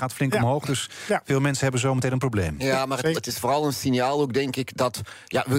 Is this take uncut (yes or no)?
no